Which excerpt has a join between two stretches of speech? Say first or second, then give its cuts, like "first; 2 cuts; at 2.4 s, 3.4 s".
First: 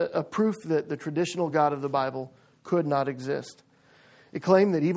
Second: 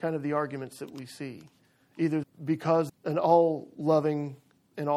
second; 2 cuts; at 2.2 s, 2.9 s